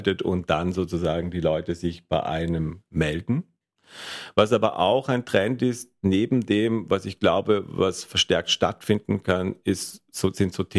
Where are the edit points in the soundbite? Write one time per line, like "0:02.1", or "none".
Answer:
none